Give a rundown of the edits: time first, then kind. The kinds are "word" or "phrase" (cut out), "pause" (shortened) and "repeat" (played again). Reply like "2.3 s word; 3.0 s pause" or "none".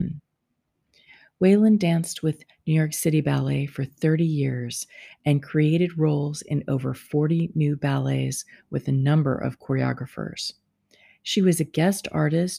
none